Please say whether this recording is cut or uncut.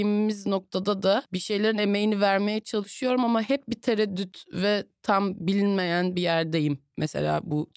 uncut